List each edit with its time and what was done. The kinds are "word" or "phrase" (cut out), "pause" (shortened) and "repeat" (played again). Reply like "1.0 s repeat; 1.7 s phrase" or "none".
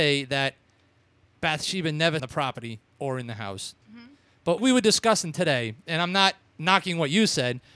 2.2 s phrase; 2.9 s pause; 4.6 s word